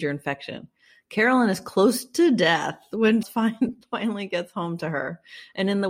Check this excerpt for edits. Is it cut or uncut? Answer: cut